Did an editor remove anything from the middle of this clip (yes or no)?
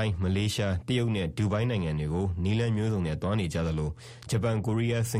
no